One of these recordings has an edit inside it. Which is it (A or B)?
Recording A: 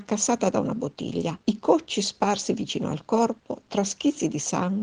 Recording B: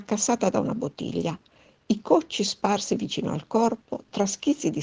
A